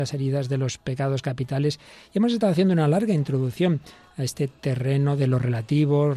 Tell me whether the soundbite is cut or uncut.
uncut